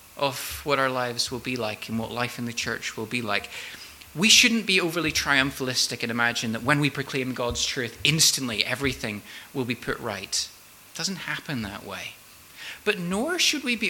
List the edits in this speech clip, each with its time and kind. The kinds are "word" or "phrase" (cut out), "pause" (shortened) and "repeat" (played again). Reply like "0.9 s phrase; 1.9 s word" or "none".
none